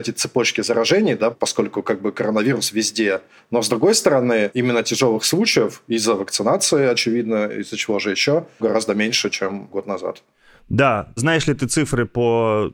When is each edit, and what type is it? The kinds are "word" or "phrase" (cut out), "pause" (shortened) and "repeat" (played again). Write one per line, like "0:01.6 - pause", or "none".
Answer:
none